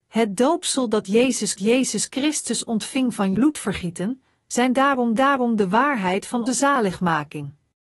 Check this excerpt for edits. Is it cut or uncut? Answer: cut